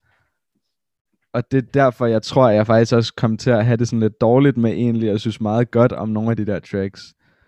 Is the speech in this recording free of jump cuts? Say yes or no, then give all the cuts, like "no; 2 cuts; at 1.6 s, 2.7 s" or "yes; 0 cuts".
yes; 0 cuts